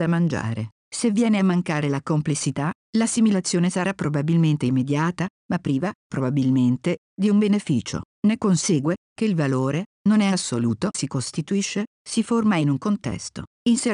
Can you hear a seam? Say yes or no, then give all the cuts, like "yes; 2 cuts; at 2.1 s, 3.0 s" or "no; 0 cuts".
yes; 2 cuts; at 6.0 s, 10.9 s